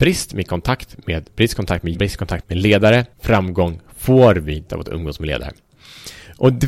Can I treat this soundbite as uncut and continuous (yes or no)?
no